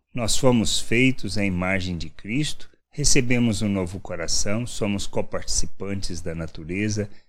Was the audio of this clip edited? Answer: yes; 1 cut; at 2.8 s

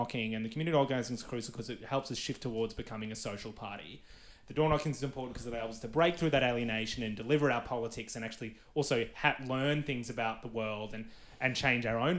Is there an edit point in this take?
no; 0 cuts

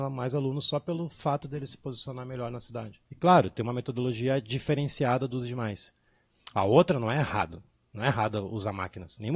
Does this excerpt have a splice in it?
yes; 1 cut; at 3.1 s

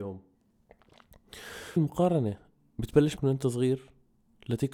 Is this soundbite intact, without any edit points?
no; 2 cuts; at 1.8 s, 3.2 s

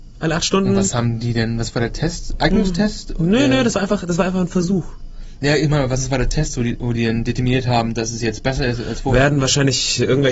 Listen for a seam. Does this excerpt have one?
no; 0 cuts

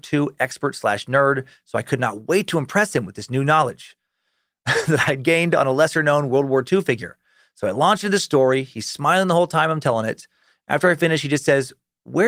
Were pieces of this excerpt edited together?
no; 0 cuts

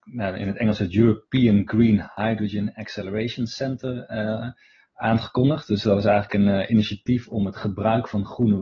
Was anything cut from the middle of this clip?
no; 0 cuts

